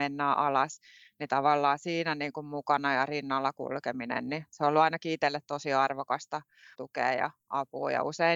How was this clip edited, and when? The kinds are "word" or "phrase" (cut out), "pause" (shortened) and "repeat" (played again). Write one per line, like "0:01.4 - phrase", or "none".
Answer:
0:06.7 - word